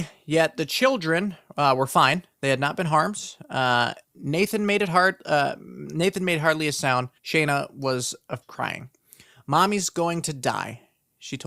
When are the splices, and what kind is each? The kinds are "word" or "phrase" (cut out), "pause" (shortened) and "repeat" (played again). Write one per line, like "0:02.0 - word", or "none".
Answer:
0:04.0 - pause
0:07.2 - pause
0:08.4 - word